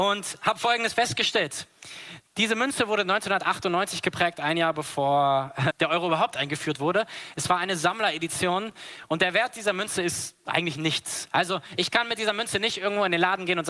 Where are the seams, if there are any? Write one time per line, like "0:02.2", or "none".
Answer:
0:05.7